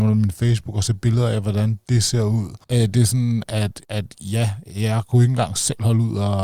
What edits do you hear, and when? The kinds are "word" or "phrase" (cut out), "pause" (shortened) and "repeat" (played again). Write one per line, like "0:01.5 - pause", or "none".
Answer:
0:02.6 - pause
0:03.8 - pause